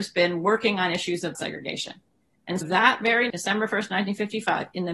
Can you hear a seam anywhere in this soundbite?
yes; 3 cuts; at 1.3 s, 2.6 s, 3.3 s

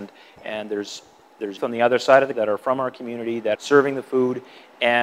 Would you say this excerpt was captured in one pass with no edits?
no; 3 cuts; at 1.6 s, 2.3 s, 3.5 s

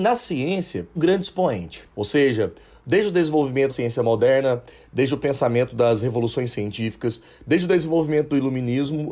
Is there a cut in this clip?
yes; 2 cuts; at 1.0 s, 3.7 s

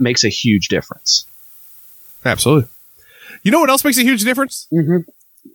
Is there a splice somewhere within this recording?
no; 0 cuts

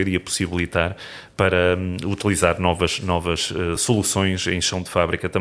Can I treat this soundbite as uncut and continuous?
yes; 0 cuts

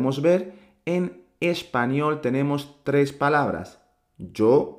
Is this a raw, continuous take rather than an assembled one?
yes; 0 cuts

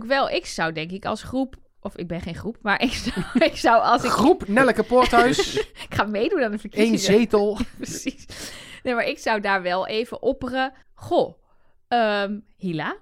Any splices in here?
yes; 1 cut; at 10.8 s

